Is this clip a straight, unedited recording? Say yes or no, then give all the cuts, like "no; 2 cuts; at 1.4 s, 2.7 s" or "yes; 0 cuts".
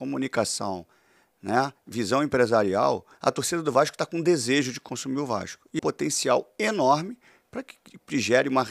no; 2 cuts; at 3.1 s, 5.8 s